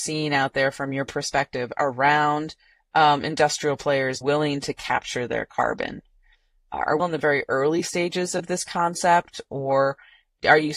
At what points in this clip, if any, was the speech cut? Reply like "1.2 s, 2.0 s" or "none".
4.2 s, 7.0 s

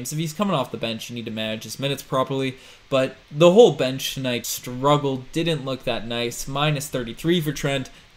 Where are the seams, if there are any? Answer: 3.2 s, 4.4 s

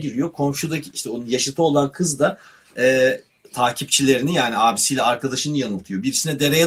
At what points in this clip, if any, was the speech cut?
none

